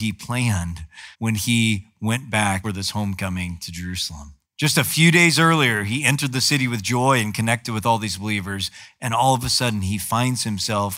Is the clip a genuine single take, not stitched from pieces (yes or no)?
no